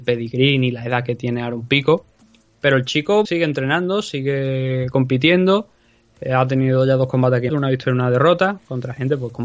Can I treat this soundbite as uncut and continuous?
no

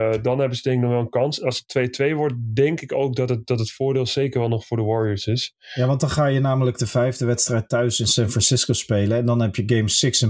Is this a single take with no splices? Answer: yes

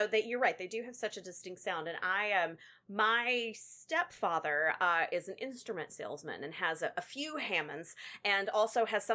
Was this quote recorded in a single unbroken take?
yes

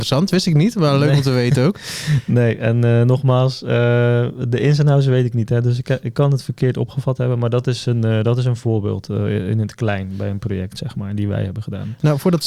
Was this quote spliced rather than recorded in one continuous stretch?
no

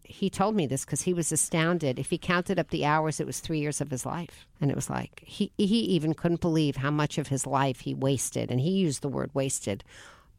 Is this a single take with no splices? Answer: no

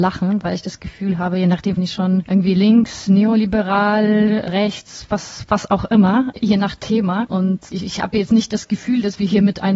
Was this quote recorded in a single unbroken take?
no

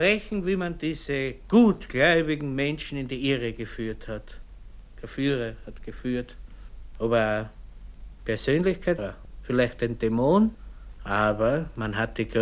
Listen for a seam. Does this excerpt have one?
yes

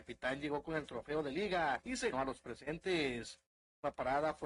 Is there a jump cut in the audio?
yes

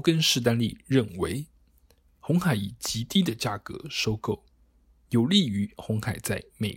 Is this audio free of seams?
yes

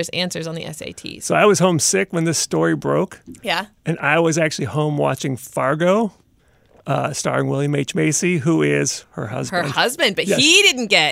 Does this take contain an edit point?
no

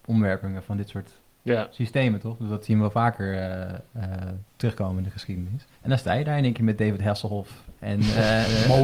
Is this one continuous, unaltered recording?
no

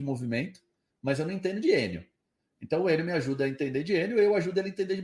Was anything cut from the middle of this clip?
no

